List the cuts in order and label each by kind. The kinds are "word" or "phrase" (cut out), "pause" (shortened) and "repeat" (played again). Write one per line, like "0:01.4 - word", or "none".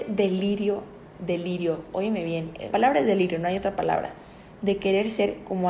0:02.7 - word